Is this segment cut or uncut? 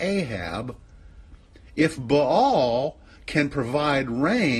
uncut